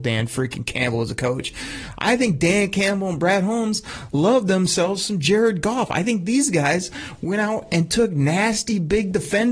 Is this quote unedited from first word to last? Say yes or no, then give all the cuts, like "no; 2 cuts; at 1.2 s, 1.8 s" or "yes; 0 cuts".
yes; 0 cuts